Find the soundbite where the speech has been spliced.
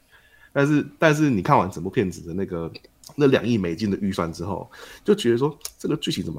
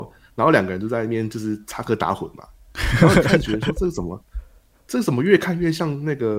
first; 1 cut; at 3.0 s

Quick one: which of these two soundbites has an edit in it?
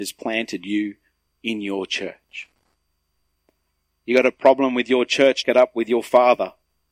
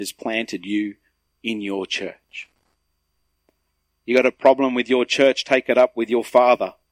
first; 1 cut; at 5.4 s

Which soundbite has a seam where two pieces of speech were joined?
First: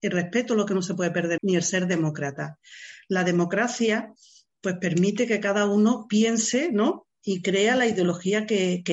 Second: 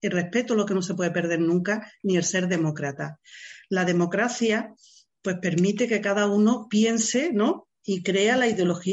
first; 1 cut; at 1.4 s

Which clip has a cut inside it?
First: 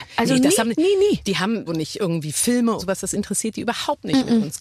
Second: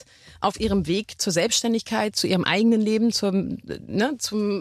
first; 2 cuts; at 1.7 s, 2.8 s

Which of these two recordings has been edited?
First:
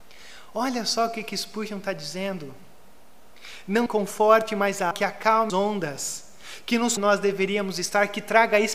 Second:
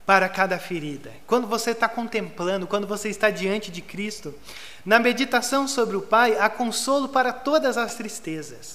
first; 4 cuts; at 3.9 s, 4.9 s, 5.5 s, 7.0 s

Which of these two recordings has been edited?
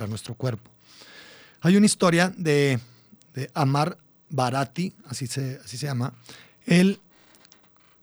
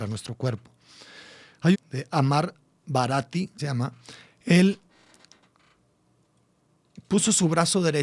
second; 2 cuts; at 1.7 s, 3.6 s

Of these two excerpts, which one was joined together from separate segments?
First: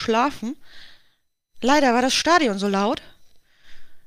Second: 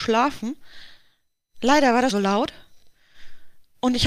second; 1 cut; at 2.1 s

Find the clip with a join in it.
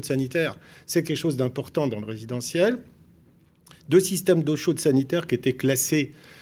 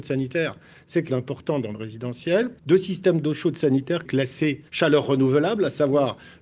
second; 4 cuts; at 1.1 s, 2.6 s, 4.0 s, 4.7 s

